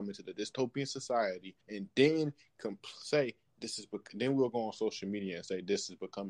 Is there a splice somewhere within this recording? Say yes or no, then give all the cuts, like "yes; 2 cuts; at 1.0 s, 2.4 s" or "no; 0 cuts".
yes; 1 cut; at 1.6 s